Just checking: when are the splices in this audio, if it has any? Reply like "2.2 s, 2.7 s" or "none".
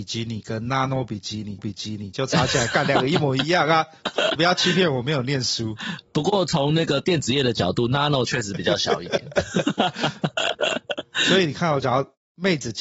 1.6 s, 4.4 s